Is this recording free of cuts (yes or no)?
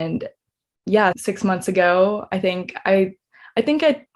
no